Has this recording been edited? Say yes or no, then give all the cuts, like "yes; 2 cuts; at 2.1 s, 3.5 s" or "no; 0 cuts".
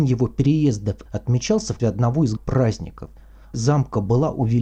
yes; 4 cuts; at 1.1 s, 1.8 s, 2.4 s, 3.5 s